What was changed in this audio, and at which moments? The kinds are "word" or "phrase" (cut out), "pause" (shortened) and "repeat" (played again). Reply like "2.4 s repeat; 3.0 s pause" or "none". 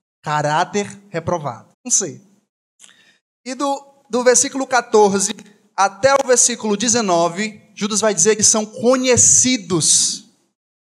1.7 s pause; 8.4 s phrase